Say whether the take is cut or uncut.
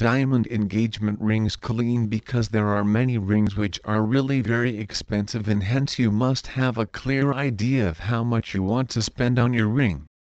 uncut